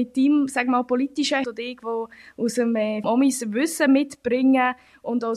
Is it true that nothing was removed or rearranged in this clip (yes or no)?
no